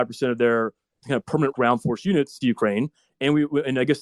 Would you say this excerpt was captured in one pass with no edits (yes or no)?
no